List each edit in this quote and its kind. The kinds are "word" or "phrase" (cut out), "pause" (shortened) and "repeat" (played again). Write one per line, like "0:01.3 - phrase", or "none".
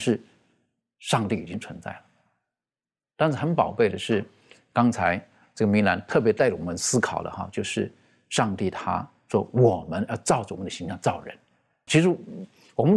0:11.9 - word